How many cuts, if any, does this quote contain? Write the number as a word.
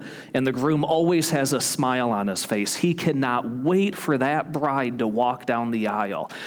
zero